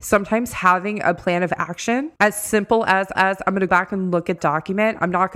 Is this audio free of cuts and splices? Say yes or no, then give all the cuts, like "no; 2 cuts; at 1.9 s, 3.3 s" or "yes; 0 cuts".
no; 4 cuts; at 2.2 s, 3.1 s, 3.7 s, 4.4 s